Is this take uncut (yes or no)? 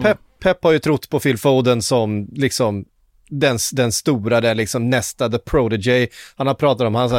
yes